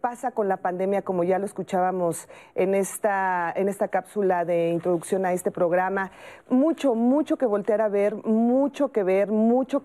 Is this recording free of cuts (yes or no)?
yes